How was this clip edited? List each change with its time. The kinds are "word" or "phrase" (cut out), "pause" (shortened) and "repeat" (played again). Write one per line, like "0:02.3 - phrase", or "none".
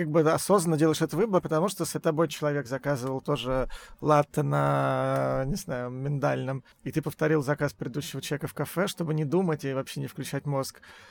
0:01.4 - word
0:02.0 - word
0:06.7 - pause
0:07.0 - word